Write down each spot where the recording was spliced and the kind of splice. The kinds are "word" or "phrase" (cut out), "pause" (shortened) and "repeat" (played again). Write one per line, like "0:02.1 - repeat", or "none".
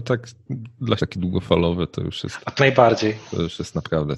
0:01.0 - phrase
0:02.6 - word